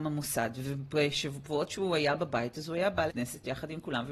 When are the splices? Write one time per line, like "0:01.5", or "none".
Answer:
0:03.1